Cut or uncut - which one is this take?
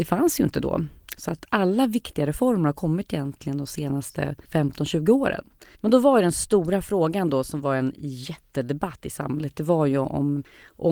cut